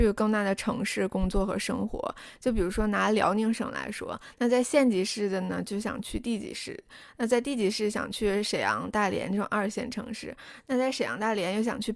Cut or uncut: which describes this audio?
uncut